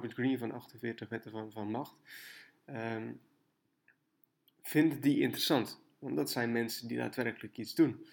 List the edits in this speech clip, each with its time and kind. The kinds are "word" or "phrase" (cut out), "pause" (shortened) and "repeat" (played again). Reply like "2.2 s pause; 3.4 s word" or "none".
none